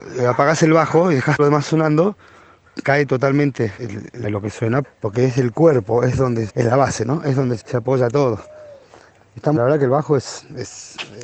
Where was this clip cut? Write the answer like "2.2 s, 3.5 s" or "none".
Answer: 1.4 s, 2.8 s, 3.8 s, 4.2 s, 4.8 s, 6.5 s, 7.6 s, 9.6 s